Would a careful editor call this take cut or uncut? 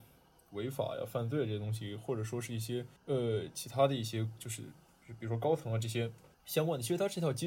cut